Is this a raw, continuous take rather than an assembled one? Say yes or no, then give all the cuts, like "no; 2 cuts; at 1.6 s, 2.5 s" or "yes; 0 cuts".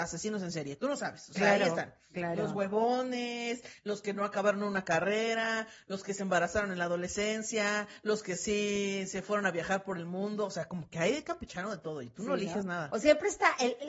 yes; 0 cuts